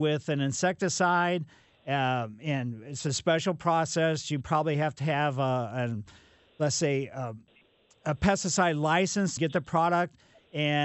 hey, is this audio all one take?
no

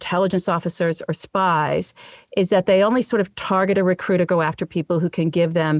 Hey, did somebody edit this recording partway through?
no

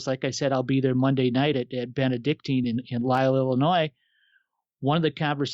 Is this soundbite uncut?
yes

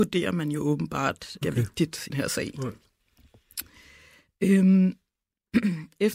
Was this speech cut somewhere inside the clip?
yes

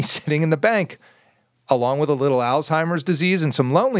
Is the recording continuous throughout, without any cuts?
yes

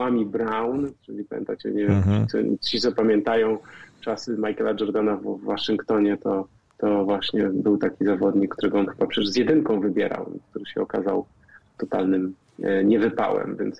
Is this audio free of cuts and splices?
no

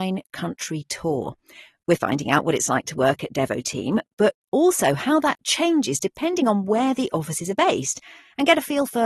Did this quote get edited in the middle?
no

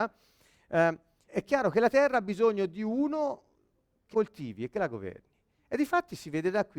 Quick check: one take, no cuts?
no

